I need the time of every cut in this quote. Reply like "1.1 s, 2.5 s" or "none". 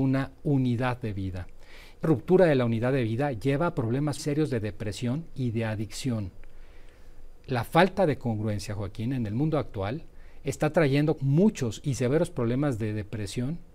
2.0 s, 4.2 s, 11.2 s

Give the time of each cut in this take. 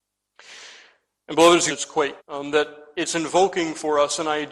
1.7 s, 2.2 s

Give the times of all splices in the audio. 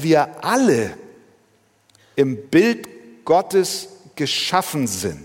none

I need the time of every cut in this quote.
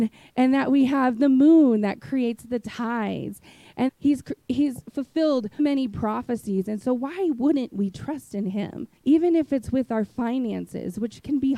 3.9 s, 5.6 s, 9.0 s

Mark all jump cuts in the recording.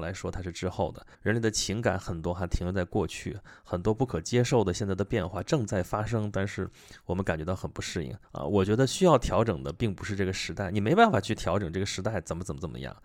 1.1 s, 8.2 s

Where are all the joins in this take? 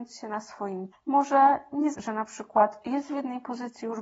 0.9 s, 1.9 s

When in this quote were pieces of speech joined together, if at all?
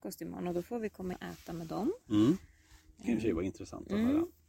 1.1 s, 3.0 s

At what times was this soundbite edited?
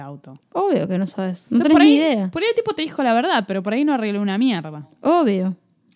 none

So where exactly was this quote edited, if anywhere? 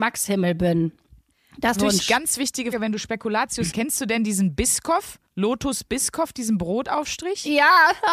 1.7 s, 2.7 s, 3.7 s, 5.3 s

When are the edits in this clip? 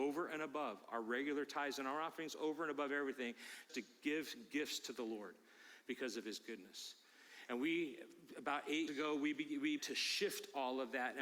3.7 s, 8.9 s, 9.8 s

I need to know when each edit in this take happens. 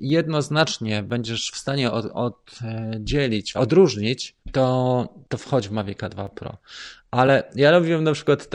3.5 s, 4.4 s

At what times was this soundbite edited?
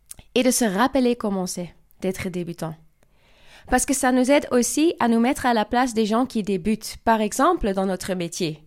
none

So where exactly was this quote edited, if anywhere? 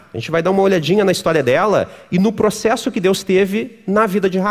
none

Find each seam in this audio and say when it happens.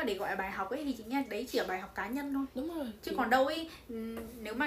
none

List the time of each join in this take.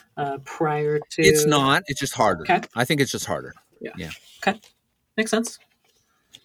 none

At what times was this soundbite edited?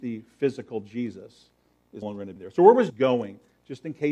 2.0 s, 2.4 s, 2.9 s

